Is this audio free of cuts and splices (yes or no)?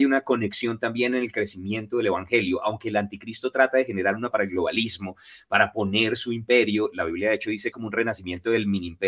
no